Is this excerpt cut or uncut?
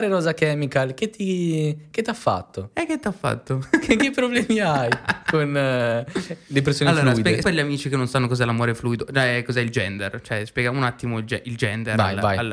cut